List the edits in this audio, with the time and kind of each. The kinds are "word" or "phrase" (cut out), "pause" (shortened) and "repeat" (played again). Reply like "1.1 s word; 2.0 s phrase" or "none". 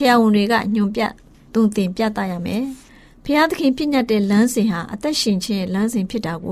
none